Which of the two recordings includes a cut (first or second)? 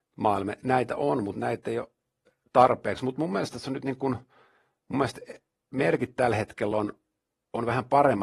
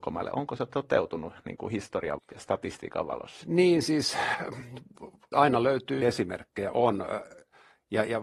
second